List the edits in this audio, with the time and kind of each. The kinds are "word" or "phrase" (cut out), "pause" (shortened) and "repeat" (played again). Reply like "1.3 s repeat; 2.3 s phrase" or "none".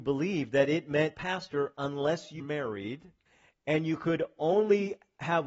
1.1 s phrase; 2.4 s word; 3.3 s pause